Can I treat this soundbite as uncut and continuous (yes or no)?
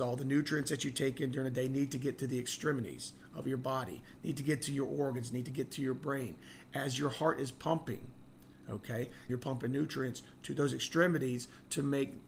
no